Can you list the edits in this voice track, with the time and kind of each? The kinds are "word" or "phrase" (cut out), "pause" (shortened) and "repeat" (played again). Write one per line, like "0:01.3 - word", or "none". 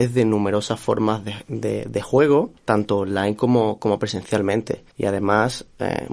0:02.6 - pause
0:04.9 - pause